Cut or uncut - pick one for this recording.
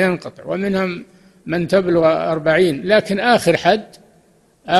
uncut